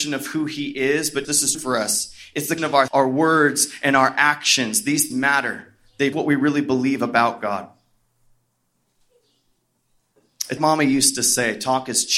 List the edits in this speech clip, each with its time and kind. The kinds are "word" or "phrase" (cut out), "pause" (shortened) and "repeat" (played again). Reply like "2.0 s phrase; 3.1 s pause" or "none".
1.2 s word; 1.5 s word; 2.6 s word; 2.9 s word; 5.1 s word; 6.1 s word; 10.6 s word